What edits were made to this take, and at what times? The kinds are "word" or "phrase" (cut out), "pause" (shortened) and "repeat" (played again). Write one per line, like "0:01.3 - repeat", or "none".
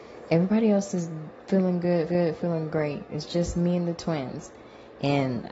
0:02.1 - repeat

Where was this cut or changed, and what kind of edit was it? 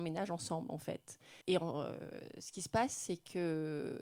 0:01.4 - pause

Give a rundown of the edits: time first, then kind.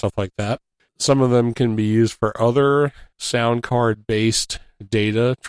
0:03.1 - pause

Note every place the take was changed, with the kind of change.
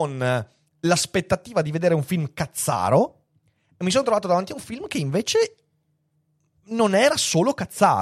none

